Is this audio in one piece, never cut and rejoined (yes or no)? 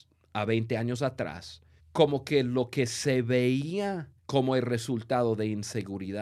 no